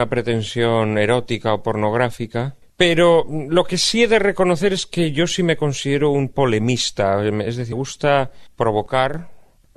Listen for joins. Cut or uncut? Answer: cut